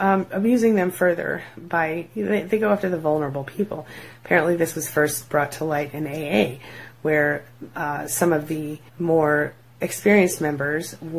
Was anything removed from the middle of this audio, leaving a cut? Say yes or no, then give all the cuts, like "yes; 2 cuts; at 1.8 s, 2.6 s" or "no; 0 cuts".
yes; 1 cut; at 8.9 s